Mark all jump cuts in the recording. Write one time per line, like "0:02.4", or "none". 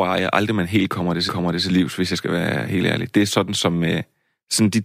0:01.3